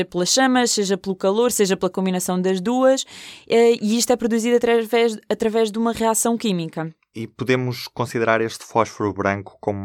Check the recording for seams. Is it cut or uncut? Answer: uncut